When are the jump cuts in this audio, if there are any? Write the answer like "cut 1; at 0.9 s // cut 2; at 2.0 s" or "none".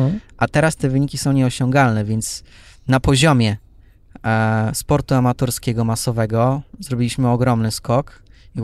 none